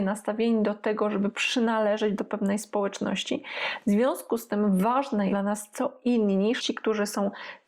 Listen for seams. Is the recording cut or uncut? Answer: cut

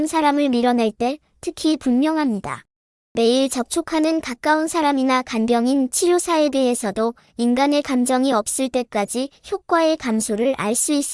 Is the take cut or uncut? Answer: uncut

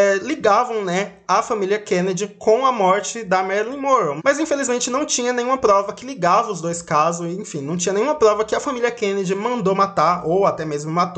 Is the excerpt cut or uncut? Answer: uncut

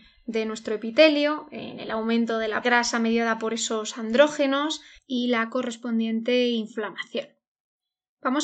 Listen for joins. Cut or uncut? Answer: cut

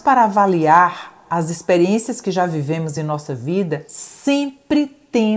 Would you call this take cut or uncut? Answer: uncut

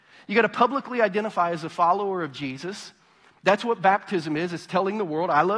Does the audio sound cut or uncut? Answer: uncut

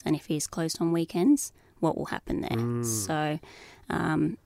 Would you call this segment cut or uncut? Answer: uncut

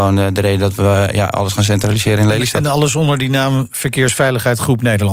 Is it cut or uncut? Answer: uncut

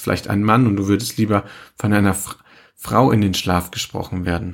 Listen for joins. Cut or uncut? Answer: uncut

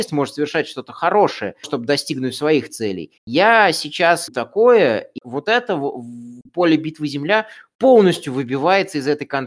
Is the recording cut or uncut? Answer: cut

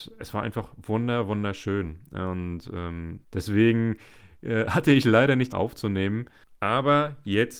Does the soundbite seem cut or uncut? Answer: cut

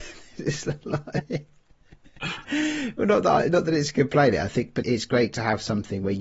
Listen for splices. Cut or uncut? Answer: cut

